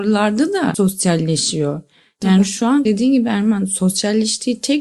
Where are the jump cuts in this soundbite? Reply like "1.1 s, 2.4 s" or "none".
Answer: 2.9 s